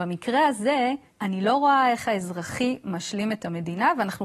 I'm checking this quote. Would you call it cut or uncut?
cut